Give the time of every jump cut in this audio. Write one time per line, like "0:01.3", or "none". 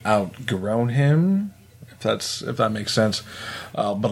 none